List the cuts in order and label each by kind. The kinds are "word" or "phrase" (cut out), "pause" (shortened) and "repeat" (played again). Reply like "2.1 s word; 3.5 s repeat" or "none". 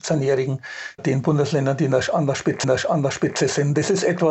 1.0 s word; 2.6 s repeat